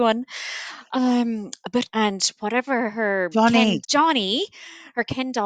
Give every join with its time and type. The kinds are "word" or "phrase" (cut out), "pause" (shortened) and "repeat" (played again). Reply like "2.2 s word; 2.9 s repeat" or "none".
1.9 s word; 3.8 s word